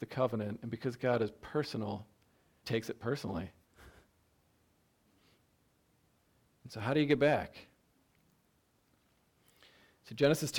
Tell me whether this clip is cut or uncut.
cut